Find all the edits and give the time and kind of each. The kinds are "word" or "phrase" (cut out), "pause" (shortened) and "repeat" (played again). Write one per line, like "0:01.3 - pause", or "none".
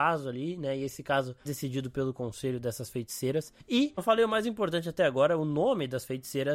0:01.5 - word
0:04.0 - word